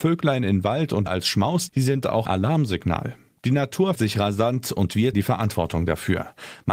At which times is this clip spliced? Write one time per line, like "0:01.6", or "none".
0:01.1
0:01.7
0:02.2
0:03.9
0:05.1